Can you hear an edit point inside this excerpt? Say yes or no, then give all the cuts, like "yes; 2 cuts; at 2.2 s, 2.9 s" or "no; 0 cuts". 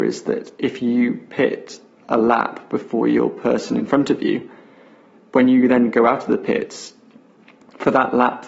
no; 0 cuts